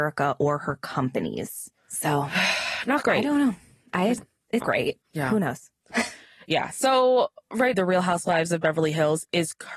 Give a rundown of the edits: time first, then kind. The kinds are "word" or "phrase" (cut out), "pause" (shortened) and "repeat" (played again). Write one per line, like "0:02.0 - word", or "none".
0:01.8 - pause
0:04.2 - word
0:04.6 - word
0:05.0 - word
0:07.7 - word

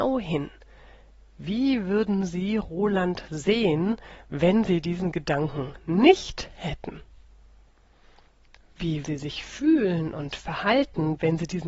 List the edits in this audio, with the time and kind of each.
0:09.0 - word

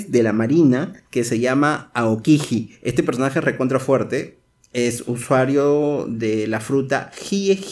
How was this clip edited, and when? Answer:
none

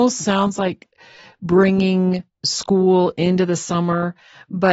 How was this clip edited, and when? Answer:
0:02.3 - pause

